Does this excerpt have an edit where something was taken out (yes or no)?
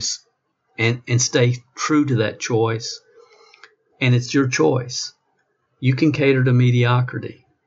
no